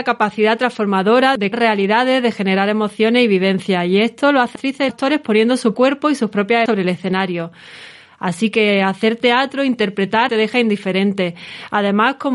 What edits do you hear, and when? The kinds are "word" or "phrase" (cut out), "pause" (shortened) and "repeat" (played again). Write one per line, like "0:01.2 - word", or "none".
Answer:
0:01.5 - word
0:04.6 - word
0:04.9 - word
0:05.7 - word
0:06.7 - word
0:10.3 - word